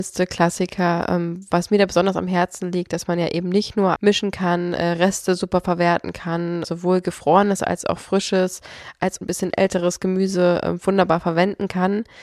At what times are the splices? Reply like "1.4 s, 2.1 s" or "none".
4.0 s, 6.6 s, 9.2 s